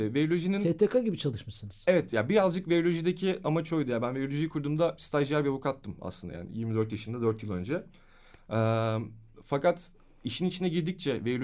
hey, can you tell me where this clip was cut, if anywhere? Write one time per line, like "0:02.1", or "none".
none